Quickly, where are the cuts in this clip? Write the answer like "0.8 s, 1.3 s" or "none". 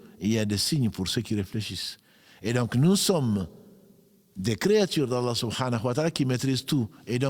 none